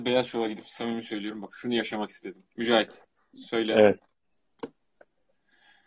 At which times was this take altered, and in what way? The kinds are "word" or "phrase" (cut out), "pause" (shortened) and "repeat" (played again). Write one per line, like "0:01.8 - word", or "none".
0:02.5 - pause